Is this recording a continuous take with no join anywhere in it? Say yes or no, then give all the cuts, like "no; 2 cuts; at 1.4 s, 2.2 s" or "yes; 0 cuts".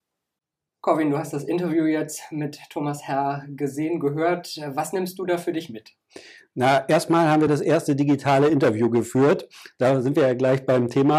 yes; 0 cuts